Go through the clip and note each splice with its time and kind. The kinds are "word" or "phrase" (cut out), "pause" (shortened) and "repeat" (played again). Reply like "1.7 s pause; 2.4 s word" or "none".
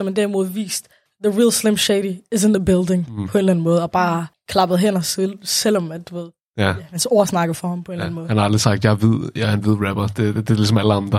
none